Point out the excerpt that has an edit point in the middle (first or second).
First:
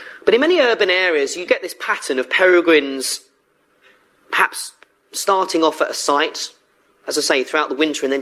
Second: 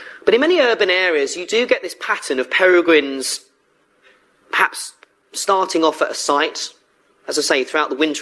first